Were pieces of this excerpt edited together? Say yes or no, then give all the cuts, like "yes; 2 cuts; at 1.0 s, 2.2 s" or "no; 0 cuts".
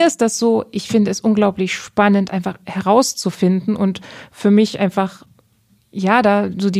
no; 0 cuts